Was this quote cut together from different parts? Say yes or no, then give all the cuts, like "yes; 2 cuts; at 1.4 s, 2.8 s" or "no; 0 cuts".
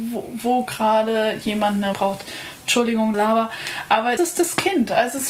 yes; 3 cuts; at 1.9 s, 3.1 s, 4.2 s